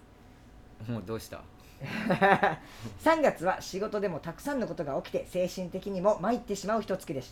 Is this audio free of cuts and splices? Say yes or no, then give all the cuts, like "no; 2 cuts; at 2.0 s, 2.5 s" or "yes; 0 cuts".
yes; 0 cuts